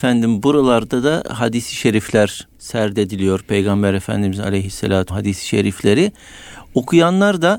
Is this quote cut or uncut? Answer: cut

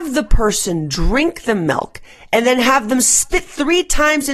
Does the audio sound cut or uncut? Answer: uncut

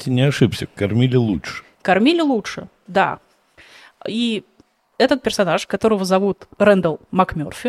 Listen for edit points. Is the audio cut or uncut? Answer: uncut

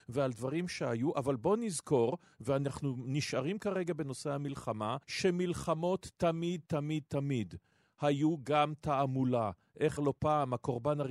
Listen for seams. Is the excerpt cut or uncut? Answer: cut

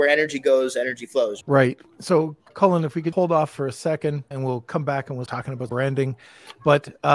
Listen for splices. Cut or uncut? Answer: cut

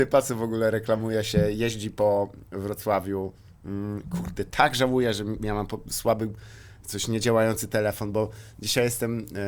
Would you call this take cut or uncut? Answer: uncut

